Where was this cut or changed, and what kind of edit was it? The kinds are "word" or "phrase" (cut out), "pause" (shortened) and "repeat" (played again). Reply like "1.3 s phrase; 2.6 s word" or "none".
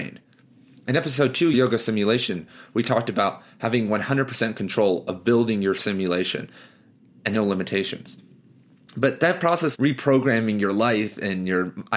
1.5 s word; 7.3 s word; 9.7 s word